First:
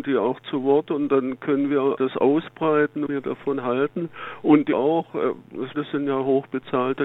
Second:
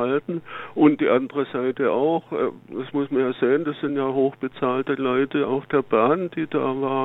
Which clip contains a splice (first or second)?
first